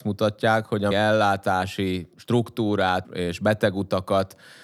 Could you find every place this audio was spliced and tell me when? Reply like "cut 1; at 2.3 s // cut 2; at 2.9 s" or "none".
cut 1; at 0.9 s // cut 2; at 3.0 s